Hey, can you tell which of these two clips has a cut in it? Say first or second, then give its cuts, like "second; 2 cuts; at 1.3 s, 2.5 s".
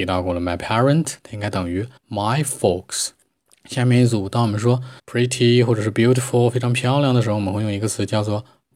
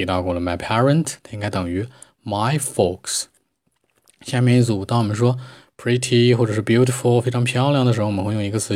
first; 3 cuts; at 2.0 s, 3.5 s, 5.0 s